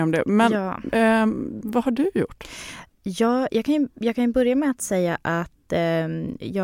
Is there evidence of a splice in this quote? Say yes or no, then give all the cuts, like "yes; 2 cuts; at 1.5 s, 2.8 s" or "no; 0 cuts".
no; 0 cuts